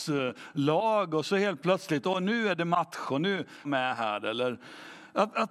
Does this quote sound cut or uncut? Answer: cut